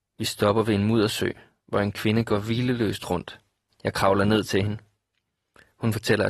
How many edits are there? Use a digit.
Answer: 0